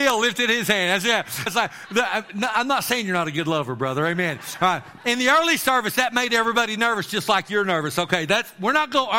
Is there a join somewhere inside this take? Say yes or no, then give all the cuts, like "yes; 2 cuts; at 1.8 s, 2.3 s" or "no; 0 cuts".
yes; 1 cut; at 1.5 s